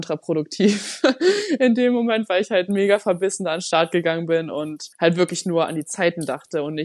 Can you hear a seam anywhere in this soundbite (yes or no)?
yes